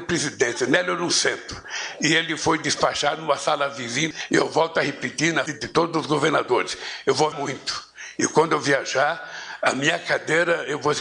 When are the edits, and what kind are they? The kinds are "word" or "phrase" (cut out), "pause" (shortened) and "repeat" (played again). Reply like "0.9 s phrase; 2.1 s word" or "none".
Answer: 5.5 s word; 7.3 s word